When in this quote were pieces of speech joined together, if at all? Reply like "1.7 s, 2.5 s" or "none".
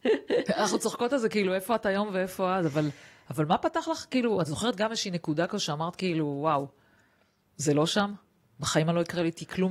none